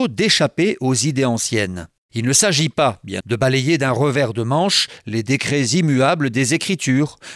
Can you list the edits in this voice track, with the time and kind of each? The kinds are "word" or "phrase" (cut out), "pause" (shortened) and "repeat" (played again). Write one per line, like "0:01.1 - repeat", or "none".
0:03.2 - word